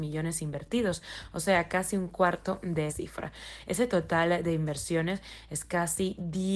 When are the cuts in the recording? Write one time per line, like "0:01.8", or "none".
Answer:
0:02.9